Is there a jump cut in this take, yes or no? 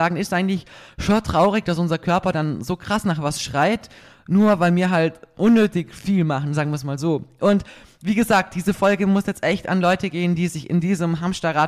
no